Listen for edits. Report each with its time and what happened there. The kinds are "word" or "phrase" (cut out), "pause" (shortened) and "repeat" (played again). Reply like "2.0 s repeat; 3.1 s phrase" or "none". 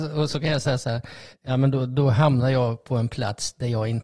1.3 s pause